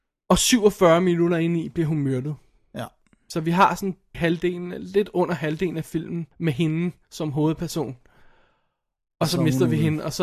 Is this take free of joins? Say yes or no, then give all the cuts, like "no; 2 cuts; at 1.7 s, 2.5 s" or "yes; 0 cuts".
no; 2 cuts; at 4.1 s, 6.3 s